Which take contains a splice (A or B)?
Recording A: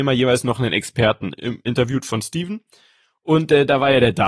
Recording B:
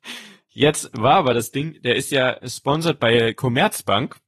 A